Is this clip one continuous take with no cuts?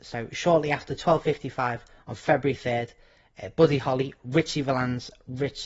yes; 0 cuts

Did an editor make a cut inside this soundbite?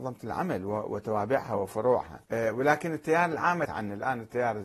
yes; 2 cuts; at 2.2 s, 3.6 s

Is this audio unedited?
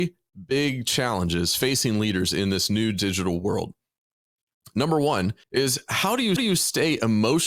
no; 2 cuts; at 5.4 s, 6.4 s

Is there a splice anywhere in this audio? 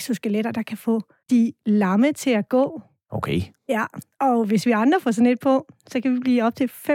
no; 0 cuts

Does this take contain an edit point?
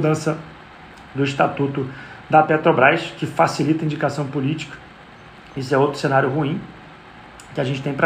no; 0 cuts

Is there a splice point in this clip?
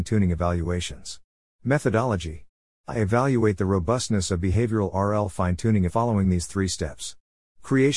yes; 1 cut; at 5.9 s

